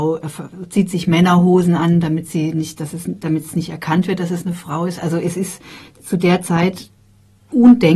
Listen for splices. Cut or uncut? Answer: uncut